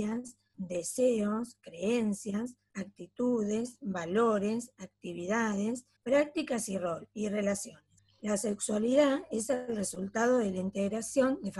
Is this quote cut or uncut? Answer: cut